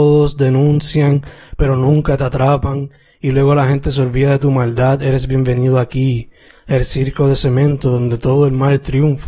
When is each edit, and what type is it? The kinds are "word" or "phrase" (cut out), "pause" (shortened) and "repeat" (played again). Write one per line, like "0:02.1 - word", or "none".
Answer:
none